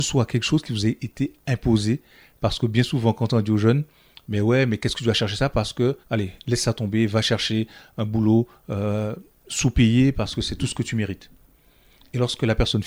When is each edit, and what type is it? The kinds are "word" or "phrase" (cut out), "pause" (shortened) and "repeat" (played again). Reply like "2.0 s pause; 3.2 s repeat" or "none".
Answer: 6.0 s pause